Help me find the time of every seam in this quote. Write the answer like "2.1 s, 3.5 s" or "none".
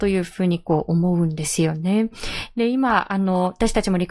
none